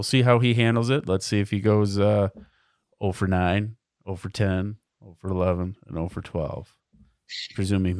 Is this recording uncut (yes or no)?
yes